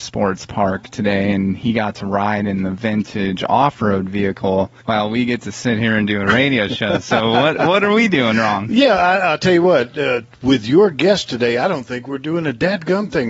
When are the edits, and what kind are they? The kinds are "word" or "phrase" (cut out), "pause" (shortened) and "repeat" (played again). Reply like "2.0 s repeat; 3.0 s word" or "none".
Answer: 4.8 s pause